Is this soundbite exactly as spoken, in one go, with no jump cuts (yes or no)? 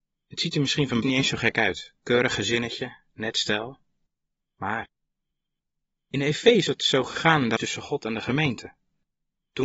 no